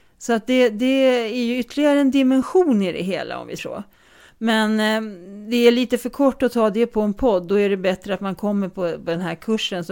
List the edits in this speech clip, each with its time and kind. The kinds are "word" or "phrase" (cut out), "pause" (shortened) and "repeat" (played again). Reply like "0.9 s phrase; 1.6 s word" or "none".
3.6 s word